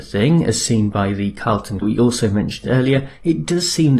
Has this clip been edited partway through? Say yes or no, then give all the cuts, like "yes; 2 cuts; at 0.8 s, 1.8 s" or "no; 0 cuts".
yes; 1 cut; at 1.8 s